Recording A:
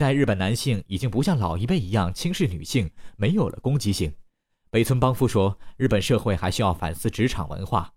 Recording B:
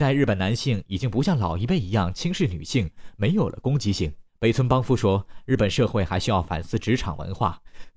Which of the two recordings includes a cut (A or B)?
B